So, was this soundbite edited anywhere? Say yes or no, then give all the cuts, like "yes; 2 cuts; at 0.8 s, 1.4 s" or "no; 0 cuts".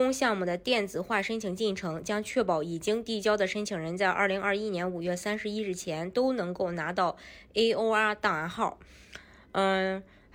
no; 0 cuts